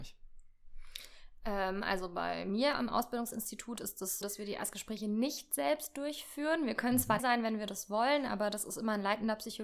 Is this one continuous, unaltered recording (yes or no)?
no